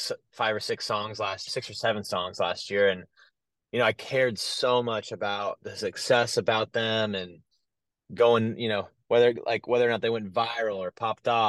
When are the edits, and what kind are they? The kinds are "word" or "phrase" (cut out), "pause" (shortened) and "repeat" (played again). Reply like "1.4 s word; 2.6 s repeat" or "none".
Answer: 1.5 s word